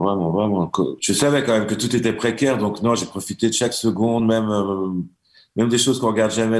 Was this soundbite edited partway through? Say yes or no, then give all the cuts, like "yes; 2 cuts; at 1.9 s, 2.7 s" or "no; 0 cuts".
no; 0 cuts